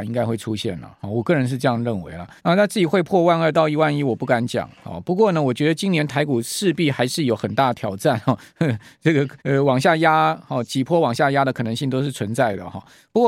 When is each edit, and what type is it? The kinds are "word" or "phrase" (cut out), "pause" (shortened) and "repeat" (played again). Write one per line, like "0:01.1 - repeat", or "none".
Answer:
0:02.4 - pause
0:09.4 - pause